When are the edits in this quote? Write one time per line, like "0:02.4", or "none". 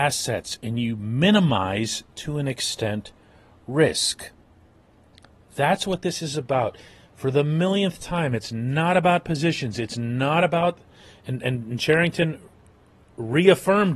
none